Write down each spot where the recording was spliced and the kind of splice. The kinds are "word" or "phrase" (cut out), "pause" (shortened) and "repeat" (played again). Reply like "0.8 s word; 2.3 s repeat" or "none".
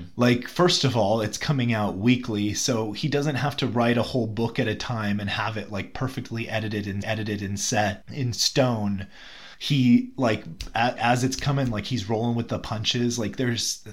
7.0 s repeat; 9.5 s pause; 11.0 s word